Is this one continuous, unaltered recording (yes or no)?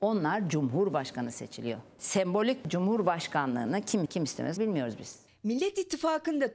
no